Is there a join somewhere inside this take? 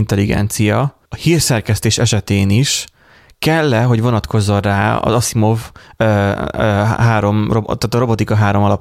yes; 1 cut; at 1.0 s

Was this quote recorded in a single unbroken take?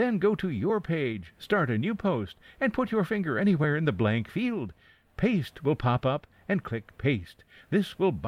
yes; 0 cuts

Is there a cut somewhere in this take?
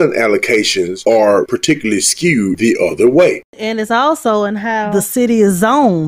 no; 0 cuts

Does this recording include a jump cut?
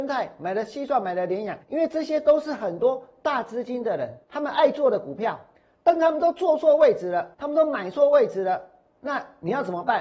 yes; 4 cuts; at 1.6 s, 4.2 s, 5.6 s, 7.3 s

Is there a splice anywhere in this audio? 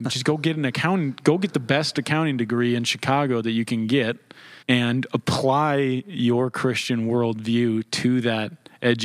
yes; 1 cut; at 4.6 s

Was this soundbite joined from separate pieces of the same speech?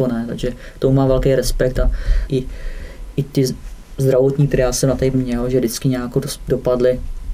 yes; 3 cuts; at 2.3 s, 4.5 s, 5.1 s

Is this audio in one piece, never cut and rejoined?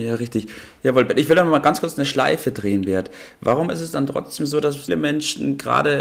no; 1 cut; at 4.9 s

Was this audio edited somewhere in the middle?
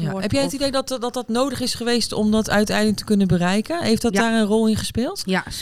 no; 0 cuts

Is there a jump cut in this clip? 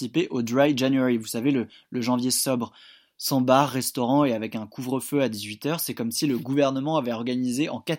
no; 0 cuts

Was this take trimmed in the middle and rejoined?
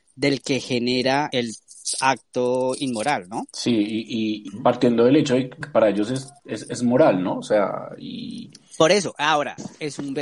yes; 1 cut; at 5.6 s

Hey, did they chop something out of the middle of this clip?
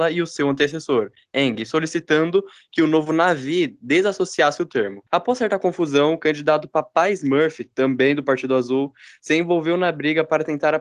yes; 1 cut; at 5.1 s

